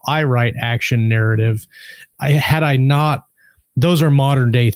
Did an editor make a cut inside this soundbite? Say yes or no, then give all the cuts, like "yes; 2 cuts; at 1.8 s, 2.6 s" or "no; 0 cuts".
yes; 1 cut; at 2.1 s